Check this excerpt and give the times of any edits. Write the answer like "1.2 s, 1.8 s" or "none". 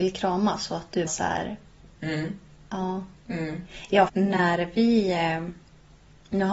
1.1 s, 4.1 s